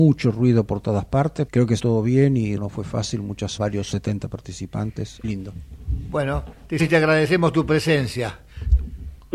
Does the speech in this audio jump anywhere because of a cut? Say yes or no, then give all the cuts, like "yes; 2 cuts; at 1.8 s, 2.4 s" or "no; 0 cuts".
yes; 7 cuts; at 1.5 s, 1.8 s, 2.6 s, 3.6 s, 3.9 s, 5.2 s, 6.8 s